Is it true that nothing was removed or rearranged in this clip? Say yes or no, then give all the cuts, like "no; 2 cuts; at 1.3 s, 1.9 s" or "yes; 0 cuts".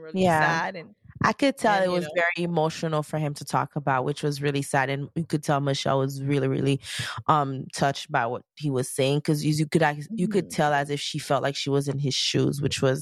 yes; 0 cuts